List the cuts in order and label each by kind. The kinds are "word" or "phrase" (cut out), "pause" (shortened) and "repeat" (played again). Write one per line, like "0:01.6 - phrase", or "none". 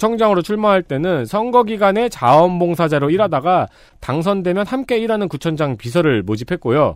none